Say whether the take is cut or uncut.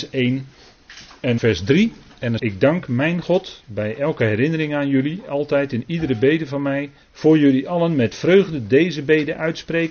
cut